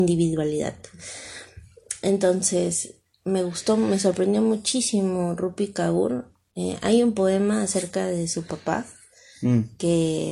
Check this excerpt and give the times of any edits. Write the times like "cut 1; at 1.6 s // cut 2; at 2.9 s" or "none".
none